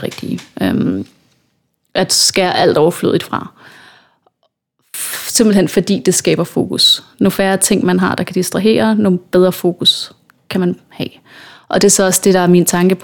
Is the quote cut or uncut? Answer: uncut